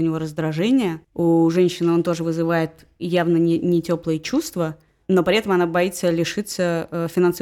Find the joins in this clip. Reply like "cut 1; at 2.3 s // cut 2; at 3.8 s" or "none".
cut 1; at 1.0 s